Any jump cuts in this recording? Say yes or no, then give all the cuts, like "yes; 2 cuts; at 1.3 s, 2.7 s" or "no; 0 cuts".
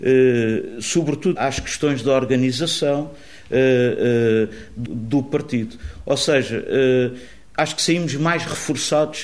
yes; 2 cuts; at 1.4 s, 4.9 s